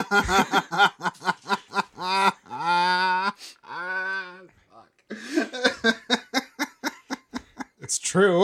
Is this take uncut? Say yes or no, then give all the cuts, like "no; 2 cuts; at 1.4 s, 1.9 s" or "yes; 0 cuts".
yes; 0 cuts